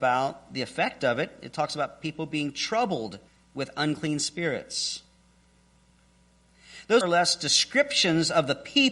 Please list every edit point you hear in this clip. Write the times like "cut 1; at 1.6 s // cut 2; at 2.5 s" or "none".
cut 1; at 3.3 s // cut 2; at 7.0 s